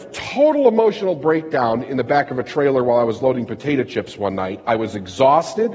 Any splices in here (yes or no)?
no